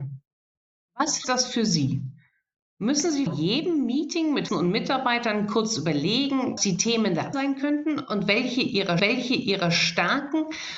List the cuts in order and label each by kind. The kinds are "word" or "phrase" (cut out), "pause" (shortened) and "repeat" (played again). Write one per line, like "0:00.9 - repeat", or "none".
0:01.2 - word
0:03.3 - word
0:04.5 - word
0:06.6 - word
0:07.3 - word
0:09.0 - repeat